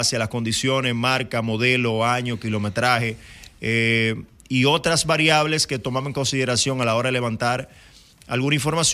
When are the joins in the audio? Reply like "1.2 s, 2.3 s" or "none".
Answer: none